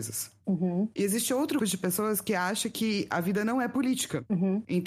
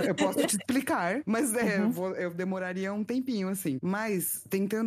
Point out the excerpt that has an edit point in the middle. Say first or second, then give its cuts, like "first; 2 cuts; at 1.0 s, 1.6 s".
first; 1 cut; at 1.6 s